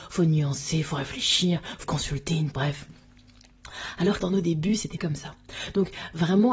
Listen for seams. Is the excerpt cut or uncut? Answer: cut